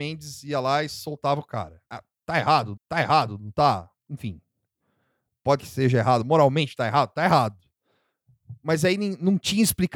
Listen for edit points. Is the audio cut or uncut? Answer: cut